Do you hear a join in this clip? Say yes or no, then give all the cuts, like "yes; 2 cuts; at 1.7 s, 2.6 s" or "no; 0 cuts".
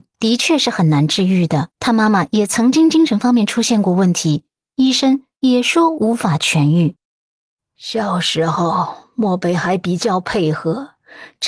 yes; 1 cut; at 1.7 s